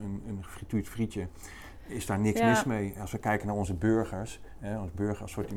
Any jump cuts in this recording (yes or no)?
no